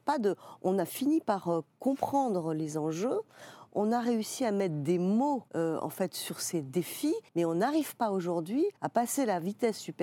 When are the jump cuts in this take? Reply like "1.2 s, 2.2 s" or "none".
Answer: 5.5 s, 7.3 s, 8.8 s